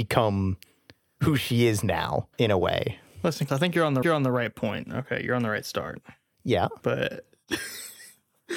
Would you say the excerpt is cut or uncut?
cut